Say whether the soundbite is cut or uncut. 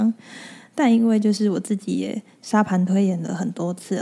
uncut